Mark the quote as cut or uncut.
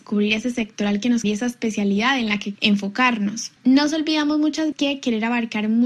cut